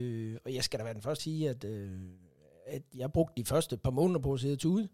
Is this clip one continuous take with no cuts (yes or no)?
no